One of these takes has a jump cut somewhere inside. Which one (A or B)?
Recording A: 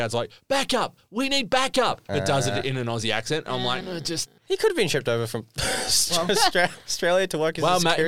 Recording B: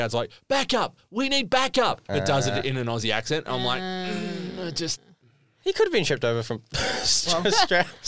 A